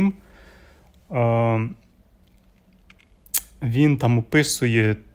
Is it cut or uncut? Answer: uncut